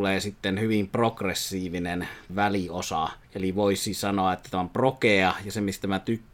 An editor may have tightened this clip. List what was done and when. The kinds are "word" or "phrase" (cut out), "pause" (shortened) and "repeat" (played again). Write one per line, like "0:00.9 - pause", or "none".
0:02.3 - word
0:03.2 - pause